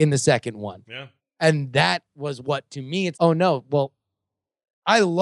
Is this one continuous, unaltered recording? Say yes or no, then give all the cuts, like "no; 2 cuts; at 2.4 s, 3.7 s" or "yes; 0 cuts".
no; 2 cuts; at 1.2 s, 3.1 s